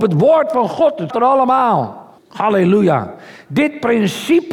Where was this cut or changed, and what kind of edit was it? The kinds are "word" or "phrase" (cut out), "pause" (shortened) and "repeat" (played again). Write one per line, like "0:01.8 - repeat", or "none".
0:01.1 - word
0:02.2 - pause

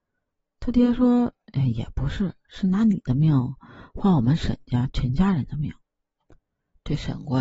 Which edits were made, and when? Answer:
none

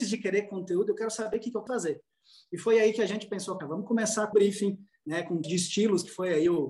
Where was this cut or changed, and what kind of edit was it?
0:01.7 - word
0:03.6 - word
0:04.3 - word
0:05.4 - word

